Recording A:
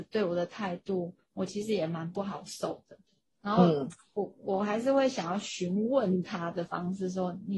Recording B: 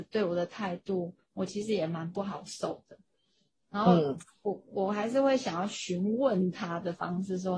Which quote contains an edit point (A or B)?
A